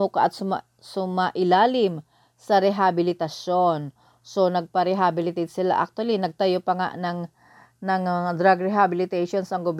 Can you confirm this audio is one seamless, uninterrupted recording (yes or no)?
yes